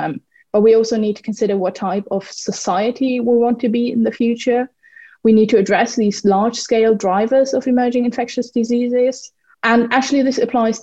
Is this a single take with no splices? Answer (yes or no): yes